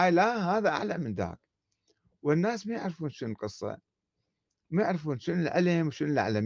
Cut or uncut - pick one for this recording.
uncut